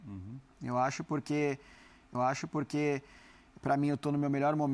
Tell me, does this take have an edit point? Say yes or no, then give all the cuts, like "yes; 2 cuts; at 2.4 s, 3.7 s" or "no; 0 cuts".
yes; 1 cut; at 2.1 s